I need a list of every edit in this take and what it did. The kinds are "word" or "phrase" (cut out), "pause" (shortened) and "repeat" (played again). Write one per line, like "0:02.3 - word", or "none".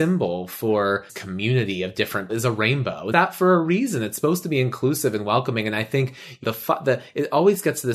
0:01.1 - word
0:02.3 - word
0:03.1 - word
0:06.4 - word